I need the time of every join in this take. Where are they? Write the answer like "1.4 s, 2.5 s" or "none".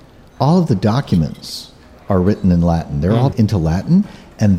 3.3 s